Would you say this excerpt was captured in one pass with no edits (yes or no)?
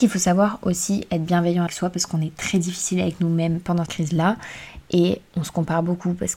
no